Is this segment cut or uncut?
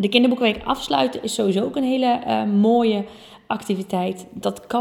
uncut